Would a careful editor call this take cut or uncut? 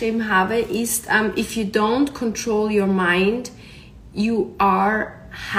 uncut